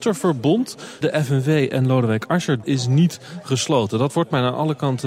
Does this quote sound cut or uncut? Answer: cut